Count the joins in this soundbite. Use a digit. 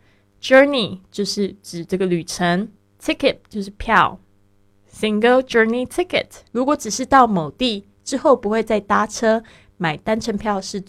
3